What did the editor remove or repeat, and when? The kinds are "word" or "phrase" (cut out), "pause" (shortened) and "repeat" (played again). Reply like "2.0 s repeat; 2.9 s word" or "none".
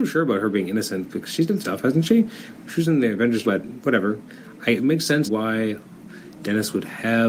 1.6 s phrase; 3.4 s word; 4.8 s word; 5.3 s word